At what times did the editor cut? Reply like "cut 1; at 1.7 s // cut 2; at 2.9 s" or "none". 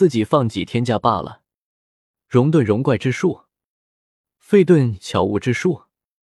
none

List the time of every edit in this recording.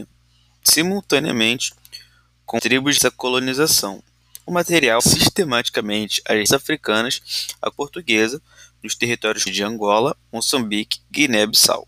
cut 1; at 2.6 s // cut 2; at 3.0 s // cut 3; at 5.0 s // cut 4; at 6.5 s // cut 5; at 7.7 s // cut 6; at 9.5 s

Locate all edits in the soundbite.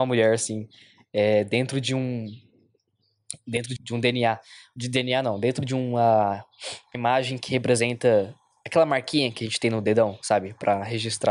cut 1; at 3.8 s // cut 2; at 6.9 s

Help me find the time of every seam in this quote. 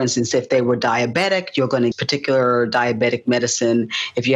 cut 1; at 1.9 s

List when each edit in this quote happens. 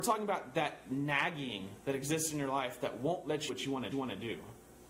cut 1; at 3.5 s // cut 2; at 3.9 s

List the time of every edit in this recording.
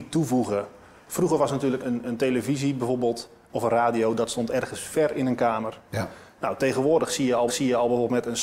cut 1; at 1.8 s // cut 2; at 7.5 s

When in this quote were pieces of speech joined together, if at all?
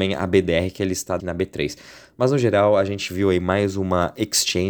cut 1; at 1.2 s

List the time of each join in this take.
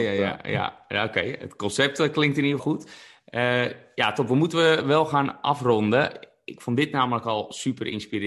cut 1; at 2.6 s

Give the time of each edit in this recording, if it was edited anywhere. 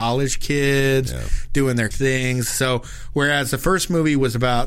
cut 1; at 1.9 s

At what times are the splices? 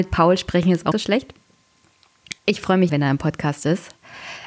cut 1; at 0.9 s // cut 2; at 2.4 s // cut 3; at 2.9 s

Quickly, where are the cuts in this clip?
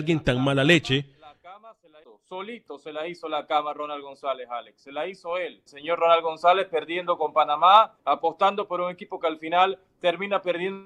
cut 1; at 2.0 s // cut 2; at 5.7 s // cut 3; at 8.0 s

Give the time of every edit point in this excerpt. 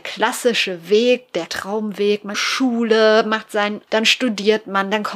cut 1; at 1.5 s // cut 2; at 2.3 s // cut 3; at 3.9 s

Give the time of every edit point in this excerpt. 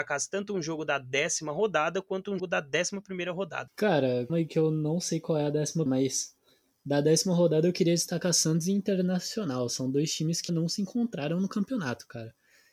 cut 1; at 2.4 s // cut 2; at 4.3 s // cut 3; at 5.9 s // cut 4; at 10.5 s

